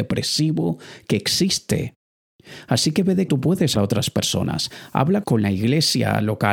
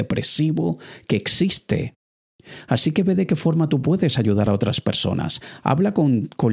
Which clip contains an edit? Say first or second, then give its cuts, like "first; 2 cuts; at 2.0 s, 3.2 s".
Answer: first; 3 cuts; at 3.3 s, 3.7 s, 5.2 s